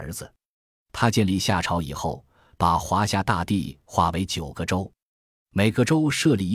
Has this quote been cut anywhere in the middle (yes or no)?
no